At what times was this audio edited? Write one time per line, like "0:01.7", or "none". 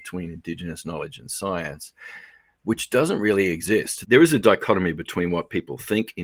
none